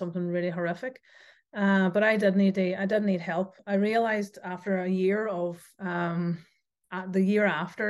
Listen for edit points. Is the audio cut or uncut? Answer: uncut